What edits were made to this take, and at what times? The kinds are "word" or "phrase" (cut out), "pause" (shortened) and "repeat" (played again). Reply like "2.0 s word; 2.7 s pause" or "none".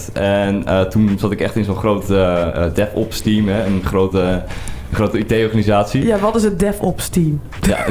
none